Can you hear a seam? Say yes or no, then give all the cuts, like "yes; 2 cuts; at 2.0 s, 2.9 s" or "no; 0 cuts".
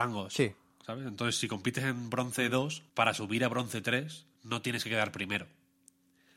yes; 2 cuts; at 2.9 s, 4.3 s